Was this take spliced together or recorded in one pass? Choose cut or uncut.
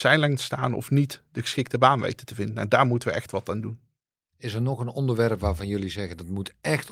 uncut